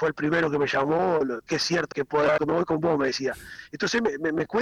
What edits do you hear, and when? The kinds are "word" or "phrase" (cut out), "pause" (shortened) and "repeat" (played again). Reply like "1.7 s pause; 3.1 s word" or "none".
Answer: 1.5 s word; 1.9 s word; 2.4 s word